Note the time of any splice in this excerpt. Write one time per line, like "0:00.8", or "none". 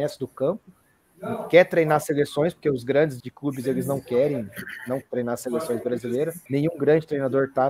0:03.2
0:05.0
0:06.5